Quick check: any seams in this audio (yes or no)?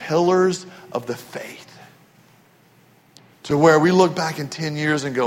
no